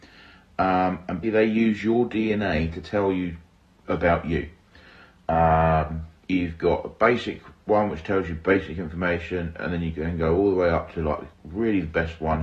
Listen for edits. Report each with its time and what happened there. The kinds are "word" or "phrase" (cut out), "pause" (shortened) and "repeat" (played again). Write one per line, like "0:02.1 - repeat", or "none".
0:01.2 - word
0:06.2 - pause
0:11.3 - pause